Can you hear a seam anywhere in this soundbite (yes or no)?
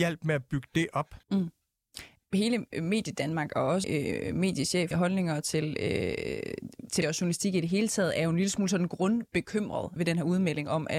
yes